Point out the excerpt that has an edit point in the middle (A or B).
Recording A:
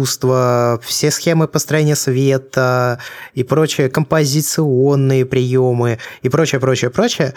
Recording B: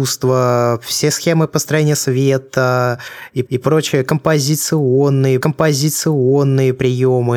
B